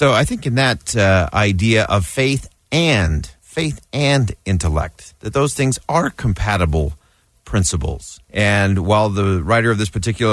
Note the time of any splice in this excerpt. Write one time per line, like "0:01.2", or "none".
0:03.4
0:08.2